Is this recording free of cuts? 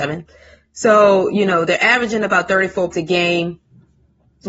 no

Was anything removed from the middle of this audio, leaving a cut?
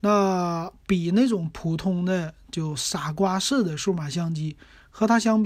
no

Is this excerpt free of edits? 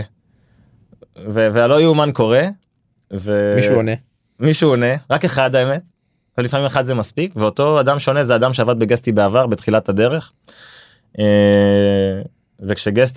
yes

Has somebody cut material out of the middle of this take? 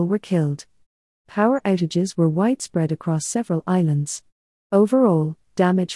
no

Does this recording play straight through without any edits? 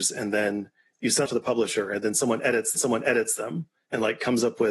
no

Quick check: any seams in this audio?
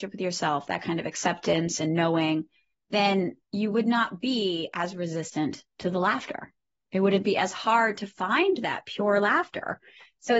no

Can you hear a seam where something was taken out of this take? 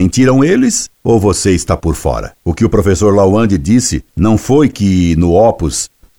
yes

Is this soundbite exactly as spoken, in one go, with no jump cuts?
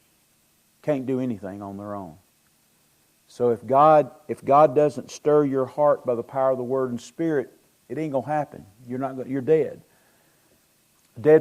yes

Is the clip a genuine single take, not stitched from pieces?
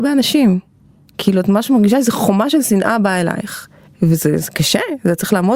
no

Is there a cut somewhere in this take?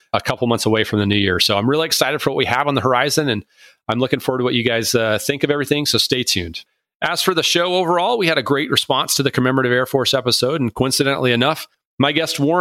no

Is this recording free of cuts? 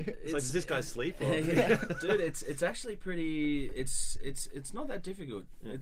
yes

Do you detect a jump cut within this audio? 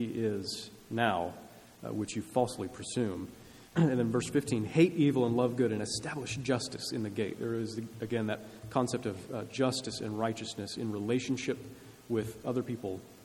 yes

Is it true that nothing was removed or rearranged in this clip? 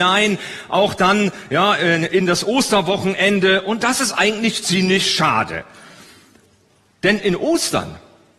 yes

